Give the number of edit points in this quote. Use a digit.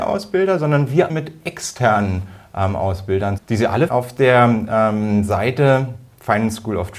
3